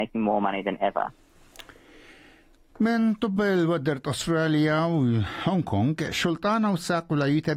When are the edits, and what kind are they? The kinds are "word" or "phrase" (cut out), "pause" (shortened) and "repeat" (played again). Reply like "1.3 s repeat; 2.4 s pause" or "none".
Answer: none